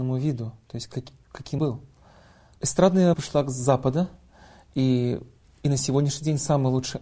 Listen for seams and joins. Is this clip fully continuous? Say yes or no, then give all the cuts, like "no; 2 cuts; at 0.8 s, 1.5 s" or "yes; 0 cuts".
no; 3 cuts; at 1.6 s, 3.1 s, 5.4 s